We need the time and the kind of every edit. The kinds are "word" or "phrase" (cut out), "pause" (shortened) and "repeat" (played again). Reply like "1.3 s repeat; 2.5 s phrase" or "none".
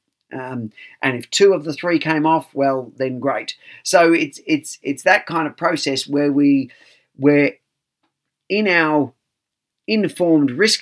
none